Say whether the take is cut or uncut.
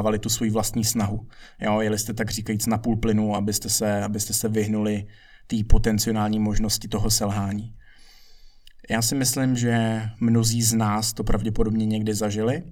uncut